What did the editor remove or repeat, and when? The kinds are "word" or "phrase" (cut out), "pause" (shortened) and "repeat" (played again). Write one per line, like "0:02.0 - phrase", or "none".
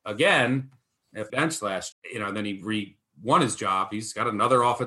0:01.3 - word
0:01.9 - word